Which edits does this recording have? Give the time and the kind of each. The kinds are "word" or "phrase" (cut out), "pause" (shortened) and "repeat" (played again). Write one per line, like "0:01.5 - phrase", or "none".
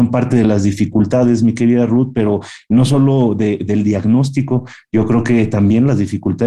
none